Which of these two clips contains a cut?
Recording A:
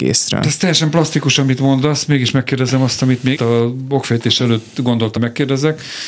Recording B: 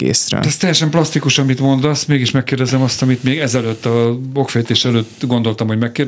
A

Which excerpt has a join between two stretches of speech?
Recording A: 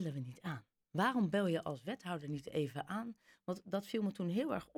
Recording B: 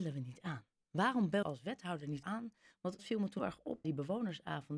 B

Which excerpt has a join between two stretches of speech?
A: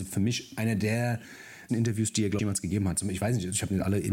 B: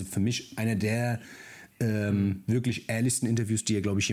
A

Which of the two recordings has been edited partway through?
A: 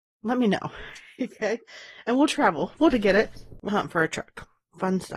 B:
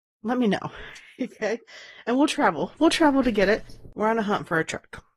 A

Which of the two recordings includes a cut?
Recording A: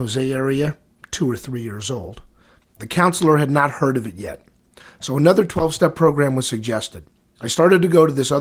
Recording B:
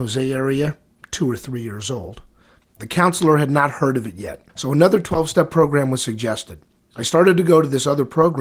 B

